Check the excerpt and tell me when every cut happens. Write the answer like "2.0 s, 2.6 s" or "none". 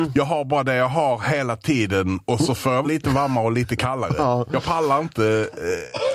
2.8 s